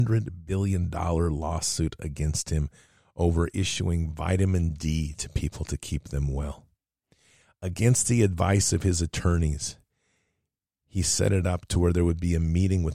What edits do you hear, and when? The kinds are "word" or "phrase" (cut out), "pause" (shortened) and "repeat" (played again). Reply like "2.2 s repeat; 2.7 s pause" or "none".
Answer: none